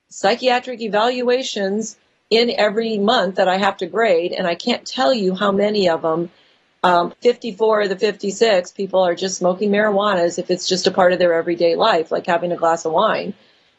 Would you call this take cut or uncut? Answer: cut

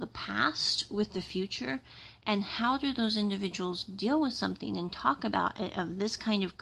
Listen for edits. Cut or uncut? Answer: uncut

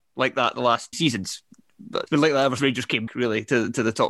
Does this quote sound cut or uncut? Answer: cut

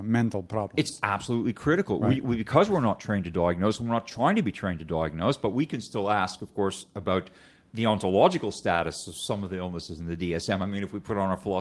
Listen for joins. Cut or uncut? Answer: uncut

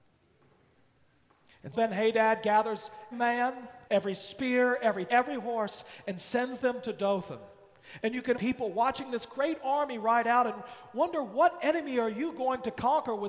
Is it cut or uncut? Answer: cut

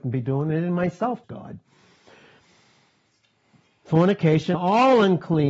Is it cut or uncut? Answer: cut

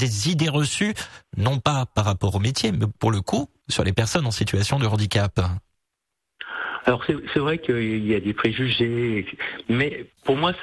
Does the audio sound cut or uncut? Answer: uncut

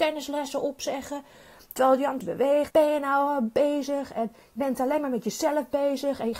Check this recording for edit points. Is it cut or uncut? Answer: cut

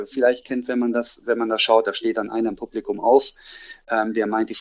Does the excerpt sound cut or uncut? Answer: uncut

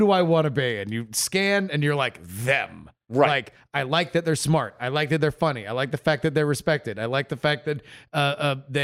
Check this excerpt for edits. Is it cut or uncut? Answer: uncut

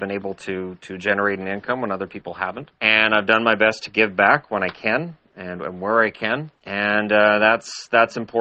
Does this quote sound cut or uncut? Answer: cut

